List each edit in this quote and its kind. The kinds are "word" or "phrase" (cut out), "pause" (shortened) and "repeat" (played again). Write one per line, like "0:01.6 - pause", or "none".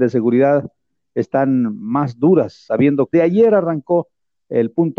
0:03.1 - word